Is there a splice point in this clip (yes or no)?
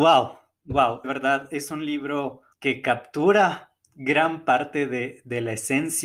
yes